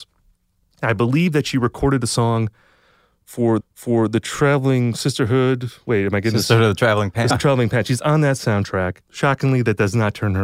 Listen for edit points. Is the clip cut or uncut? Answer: cut